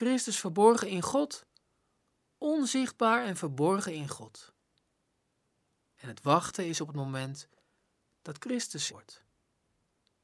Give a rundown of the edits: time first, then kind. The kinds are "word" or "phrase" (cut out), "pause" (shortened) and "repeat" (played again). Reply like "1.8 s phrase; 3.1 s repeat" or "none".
8.9 s word